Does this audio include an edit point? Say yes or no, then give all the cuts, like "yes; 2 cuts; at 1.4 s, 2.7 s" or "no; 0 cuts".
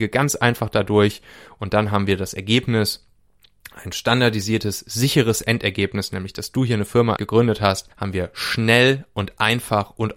yes; 2 cuts; at 7.2 s, 7.9 s